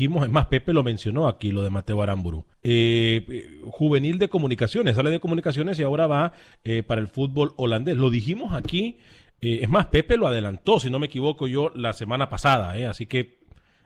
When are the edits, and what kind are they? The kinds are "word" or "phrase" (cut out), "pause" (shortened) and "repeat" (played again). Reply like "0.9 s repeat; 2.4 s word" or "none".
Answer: 2.5 s pause